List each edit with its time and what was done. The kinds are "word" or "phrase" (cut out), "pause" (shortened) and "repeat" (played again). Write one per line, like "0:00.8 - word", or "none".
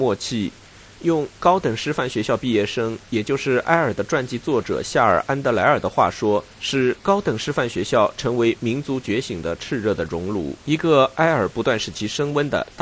0:06.5 - pause
0:10.6 - pause